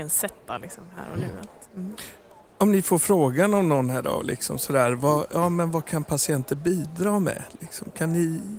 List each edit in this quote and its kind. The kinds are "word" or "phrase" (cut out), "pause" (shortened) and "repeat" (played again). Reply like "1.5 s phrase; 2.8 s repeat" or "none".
1.7 s pause